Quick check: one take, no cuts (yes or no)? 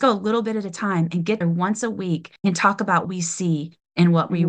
no